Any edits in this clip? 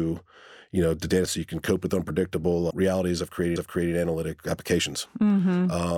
yes; 3 cuts; at 1.3 s, 2.7 s, 3.6 s

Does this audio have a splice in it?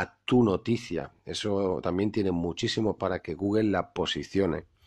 yes; 1 cut; at 3.0 s

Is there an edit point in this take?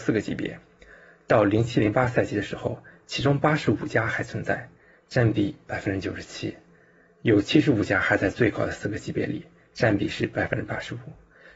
no; 0 cuts

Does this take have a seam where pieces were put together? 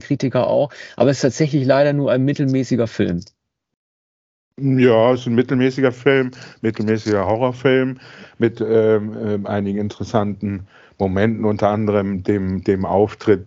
no; 0 cuts

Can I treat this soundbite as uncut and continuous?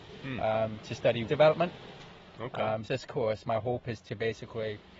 no; 2 cuts; at 1.3 s, 2.9 s

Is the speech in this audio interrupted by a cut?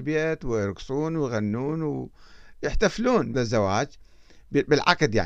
yes; 1 cut; at 3.3 s

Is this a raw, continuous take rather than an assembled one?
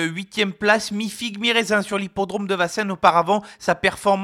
yes; 0 cuts

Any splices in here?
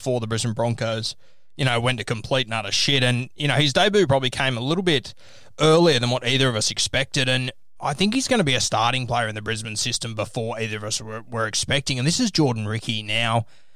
yes; 1 cut; at 7.8 s

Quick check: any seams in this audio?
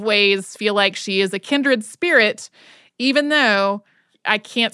no; 0 cuts

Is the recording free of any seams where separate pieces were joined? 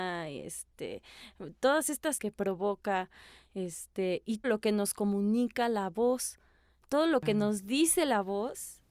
no; 2 cuts; at 2.2 s, 4.4 s

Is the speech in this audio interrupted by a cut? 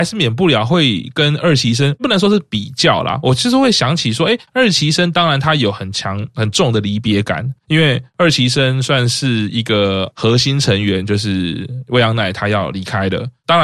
no; 0 cuts

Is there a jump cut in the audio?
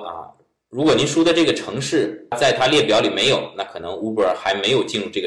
no; 0 cuts

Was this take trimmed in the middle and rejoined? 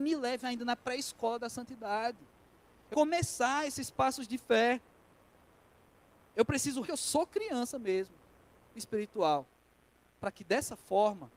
yes; 2 cuts; at 2.9 s, 6.8 s

